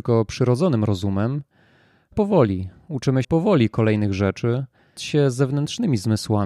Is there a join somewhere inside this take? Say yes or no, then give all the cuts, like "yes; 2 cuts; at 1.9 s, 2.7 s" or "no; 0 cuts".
yes; 3 cuts; at 2.1 s, 3.2 s, 5.0 s